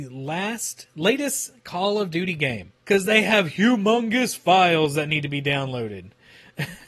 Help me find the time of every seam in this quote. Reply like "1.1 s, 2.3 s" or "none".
2.8 s